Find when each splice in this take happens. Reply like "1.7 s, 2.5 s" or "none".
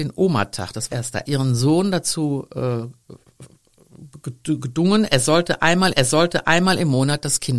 0.9 s, 1.2 s, 5.9 s